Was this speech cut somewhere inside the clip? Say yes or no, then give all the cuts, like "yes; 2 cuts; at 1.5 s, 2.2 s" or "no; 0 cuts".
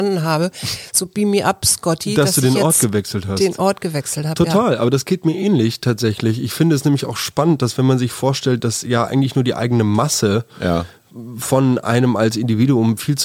no; 0 cuts